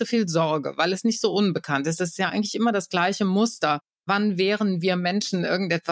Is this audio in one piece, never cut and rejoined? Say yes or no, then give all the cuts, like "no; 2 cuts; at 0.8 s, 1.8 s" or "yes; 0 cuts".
yes; 0 cuts